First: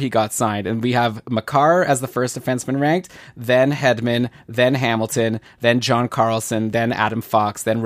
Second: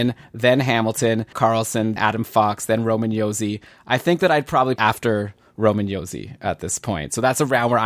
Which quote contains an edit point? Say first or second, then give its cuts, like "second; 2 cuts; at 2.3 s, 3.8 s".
second; 3 cuts; at 1.3 s, 2.0 s, 4.8 s